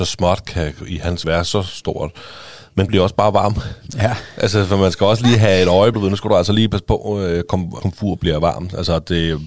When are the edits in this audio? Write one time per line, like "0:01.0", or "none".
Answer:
0:01.2
0:02.9
0:05.9
0:07.8